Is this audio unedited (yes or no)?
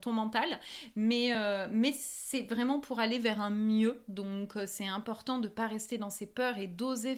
yes